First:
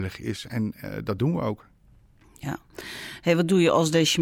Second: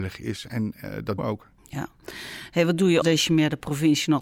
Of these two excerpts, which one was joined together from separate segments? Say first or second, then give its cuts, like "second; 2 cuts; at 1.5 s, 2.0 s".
second; 3 cuts; at 1.2 s, 1.6 s, 3.0 s